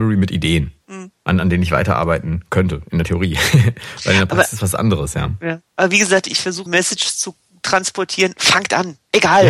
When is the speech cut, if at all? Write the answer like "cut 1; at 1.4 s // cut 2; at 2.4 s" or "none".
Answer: cut 1; at 6.7 s

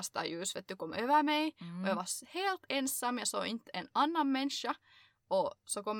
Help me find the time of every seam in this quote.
none

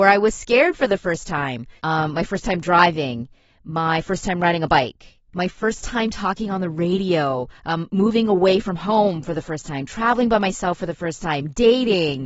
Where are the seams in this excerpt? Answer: cut 1; at 1.8 s // cut 2; at 5.2 s // cut 3; at 7.6 s

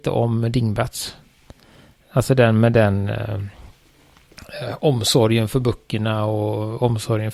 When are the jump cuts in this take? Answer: none

